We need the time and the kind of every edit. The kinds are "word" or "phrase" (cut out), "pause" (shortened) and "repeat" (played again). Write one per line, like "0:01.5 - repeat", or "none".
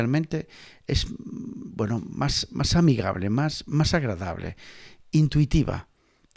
none